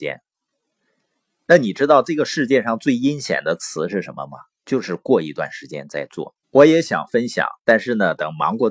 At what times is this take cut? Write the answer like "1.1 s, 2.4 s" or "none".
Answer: 6.4 s